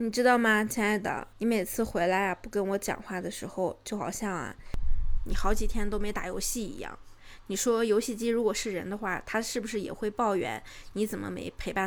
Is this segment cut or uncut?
cut